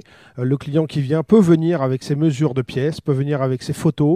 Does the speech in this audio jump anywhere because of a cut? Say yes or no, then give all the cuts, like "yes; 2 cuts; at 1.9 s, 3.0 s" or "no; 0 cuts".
no; 0 cuts